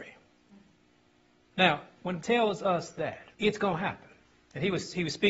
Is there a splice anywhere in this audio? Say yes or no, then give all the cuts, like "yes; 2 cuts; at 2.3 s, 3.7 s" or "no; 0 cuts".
yes; 3 cuts; at 2.2 s, 3.3 s, 4.2 s